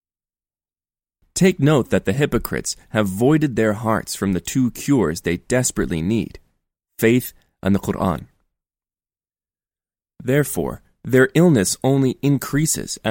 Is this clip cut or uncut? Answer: uncut